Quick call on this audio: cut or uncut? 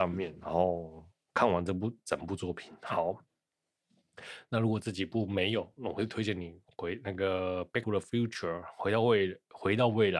cut